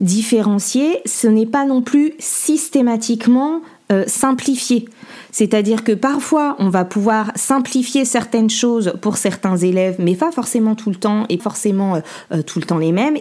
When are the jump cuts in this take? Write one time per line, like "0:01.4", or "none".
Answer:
0:11.4